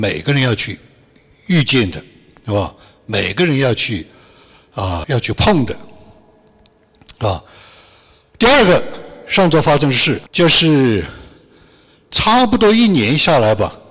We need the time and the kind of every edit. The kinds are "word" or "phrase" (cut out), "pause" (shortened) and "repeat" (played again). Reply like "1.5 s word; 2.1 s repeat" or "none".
5.0 s word; 10.3 s pause